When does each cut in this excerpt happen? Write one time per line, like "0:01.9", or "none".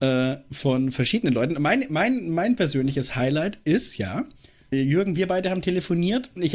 none